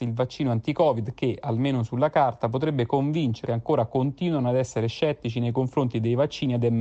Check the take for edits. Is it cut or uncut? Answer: cut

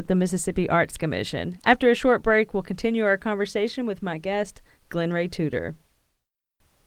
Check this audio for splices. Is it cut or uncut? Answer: uncut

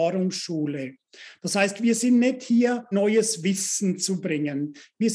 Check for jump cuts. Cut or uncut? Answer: cut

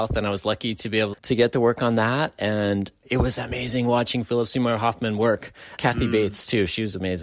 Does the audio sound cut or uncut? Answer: cut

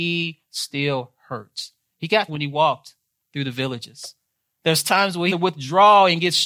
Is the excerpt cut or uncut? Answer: cut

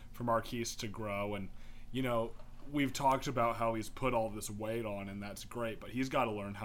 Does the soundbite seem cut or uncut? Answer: uncut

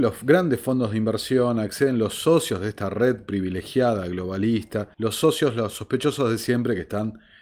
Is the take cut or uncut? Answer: cut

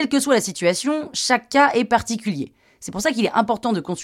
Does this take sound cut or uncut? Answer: uncut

